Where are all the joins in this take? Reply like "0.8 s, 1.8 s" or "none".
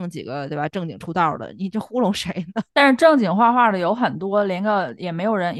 2.7 s